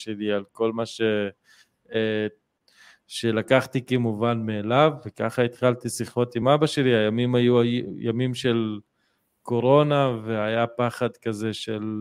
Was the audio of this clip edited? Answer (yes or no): no